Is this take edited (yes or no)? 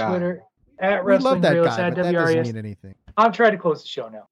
no